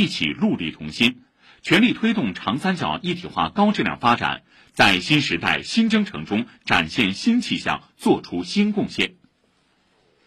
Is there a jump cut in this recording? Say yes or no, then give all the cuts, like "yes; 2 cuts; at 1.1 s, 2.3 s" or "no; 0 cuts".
no; 0 cuts